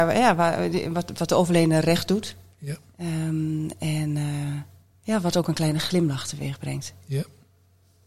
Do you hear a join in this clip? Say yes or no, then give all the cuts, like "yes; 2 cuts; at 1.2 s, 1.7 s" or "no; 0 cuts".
yes; 1 cut; at 4.9 s